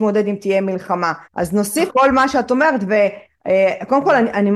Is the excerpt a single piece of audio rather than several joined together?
no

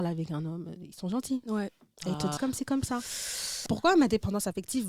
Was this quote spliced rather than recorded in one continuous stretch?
yes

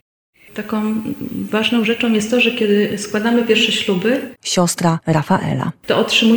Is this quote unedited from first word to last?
yes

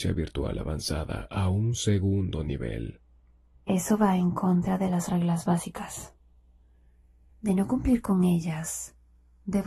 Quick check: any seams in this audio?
no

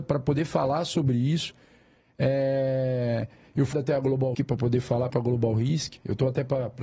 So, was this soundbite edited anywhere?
yes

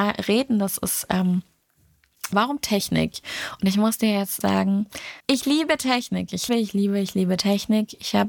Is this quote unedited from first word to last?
no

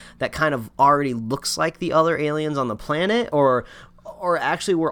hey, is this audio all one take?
yes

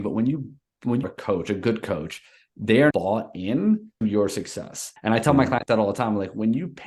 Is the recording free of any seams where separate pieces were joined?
no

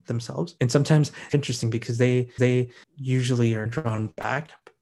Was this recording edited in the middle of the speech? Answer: yes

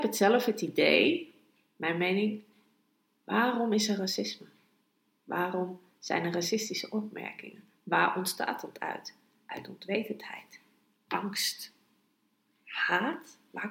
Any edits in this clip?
no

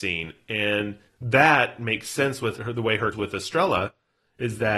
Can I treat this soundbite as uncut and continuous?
no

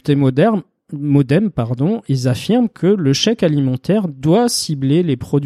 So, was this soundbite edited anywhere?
no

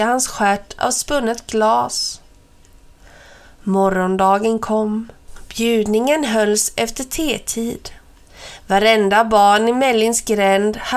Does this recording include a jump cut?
no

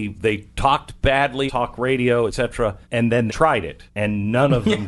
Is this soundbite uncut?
no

